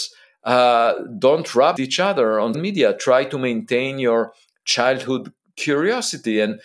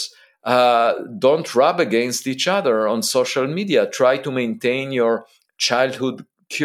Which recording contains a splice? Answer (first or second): first